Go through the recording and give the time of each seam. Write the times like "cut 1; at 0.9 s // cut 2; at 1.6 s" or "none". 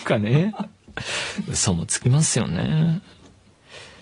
none